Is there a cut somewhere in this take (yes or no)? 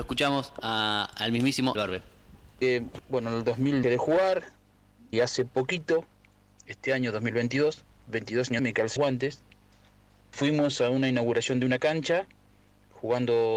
yes